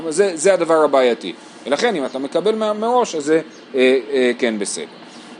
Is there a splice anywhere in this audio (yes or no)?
no